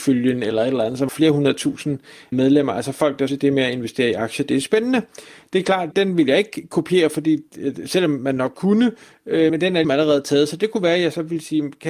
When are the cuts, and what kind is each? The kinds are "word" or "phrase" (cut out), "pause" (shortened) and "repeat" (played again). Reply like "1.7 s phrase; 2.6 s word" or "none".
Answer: 1.1 s word; 2.3 s word; 3.3 s word; 5.9 s word; 8.5 s word; 9.5 s word; 9.8 s word